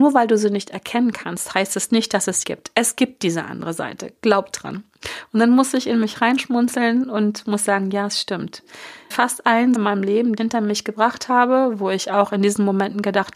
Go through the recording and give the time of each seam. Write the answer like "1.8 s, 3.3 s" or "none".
2.4 s, 9.1 s, 9.8 s, 10.4 s